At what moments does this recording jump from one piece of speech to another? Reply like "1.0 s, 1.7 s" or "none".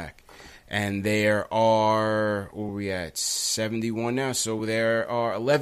none